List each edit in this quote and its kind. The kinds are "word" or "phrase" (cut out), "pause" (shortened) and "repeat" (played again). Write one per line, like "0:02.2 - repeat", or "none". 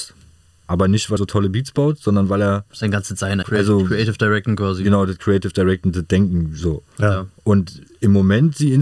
0:01.2 - word
0:02.7 - pause
0:03.4 - word
0:07.3 - pause